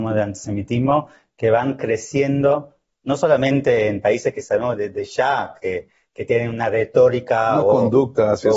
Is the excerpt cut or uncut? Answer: uncut